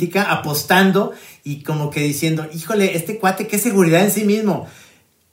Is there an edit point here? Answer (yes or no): no